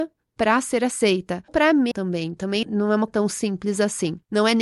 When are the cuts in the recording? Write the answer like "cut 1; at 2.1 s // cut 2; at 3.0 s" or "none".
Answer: cut 1; at 1.5 s // cut 2; at 1.9 s // cut 3; at 2.6 s // cut 4; at 3.1 s